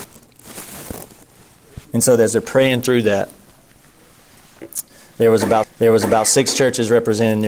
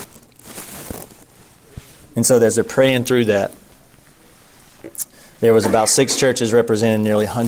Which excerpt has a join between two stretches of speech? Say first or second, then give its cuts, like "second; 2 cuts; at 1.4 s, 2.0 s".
first; 2 cuts; at 1.8 s, 5.6 s